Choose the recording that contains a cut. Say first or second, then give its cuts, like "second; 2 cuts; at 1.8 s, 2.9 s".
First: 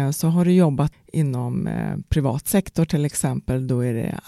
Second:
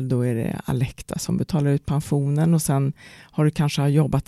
first; 1 cut; at 0.9 s